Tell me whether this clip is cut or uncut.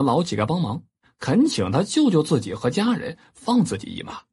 uncut